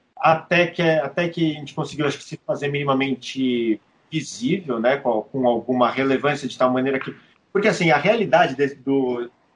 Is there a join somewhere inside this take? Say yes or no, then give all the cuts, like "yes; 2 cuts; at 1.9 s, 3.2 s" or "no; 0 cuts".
no; 0 cuts